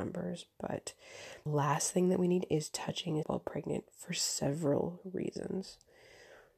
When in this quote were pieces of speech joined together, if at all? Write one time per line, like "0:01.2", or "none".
0:01.5
0:02.4
0:03.2